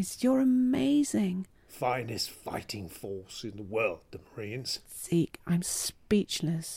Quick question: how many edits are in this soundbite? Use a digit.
0